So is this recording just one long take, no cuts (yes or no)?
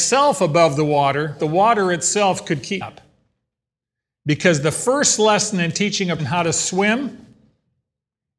no